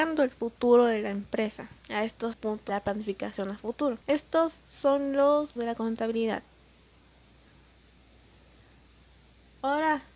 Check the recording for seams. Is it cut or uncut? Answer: cut